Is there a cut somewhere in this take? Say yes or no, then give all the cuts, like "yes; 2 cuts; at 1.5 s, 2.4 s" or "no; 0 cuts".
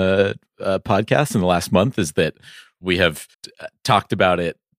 yes; 1 cut; at 3.3 s